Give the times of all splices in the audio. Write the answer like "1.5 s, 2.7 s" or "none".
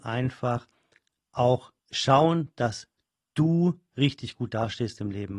1.8 s